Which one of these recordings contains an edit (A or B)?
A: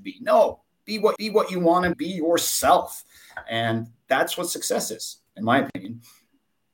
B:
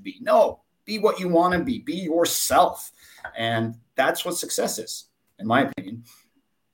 A